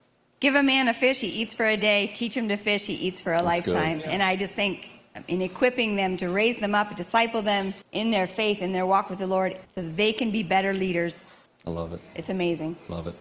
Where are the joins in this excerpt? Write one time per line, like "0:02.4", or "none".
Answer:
0:07.8
0:09.6
0:11.5